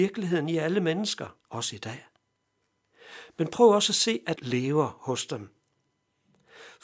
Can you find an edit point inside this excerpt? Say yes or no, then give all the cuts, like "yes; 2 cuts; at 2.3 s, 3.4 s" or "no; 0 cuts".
yes; 2 cuts; at 1.4 s, 4.4 s